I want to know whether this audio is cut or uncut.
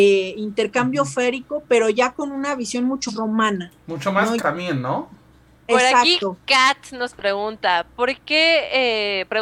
cut